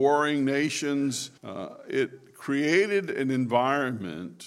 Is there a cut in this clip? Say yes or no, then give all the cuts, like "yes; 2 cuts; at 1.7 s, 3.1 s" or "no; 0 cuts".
yes; 1 cut; at 1.4 s